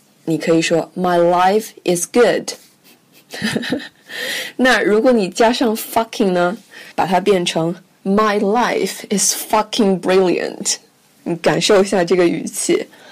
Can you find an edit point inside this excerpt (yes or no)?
yes